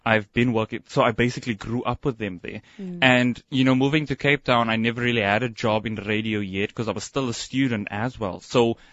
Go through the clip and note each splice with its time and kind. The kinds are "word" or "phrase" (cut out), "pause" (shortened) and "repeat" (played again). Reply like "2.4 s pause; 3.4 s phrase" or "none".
none